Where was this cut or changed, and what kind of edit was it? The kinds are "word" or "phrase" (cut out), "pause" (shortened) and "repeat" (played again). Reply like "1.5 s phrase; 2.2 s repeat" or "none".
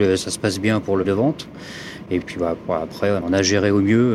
1.0 s word; 2.2 s word; 3.2 s word